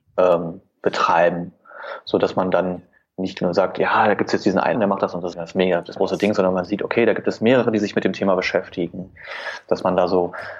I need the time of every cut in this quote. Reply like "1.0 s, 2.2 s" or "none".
4.8 s, 5.3 s, 6.0 s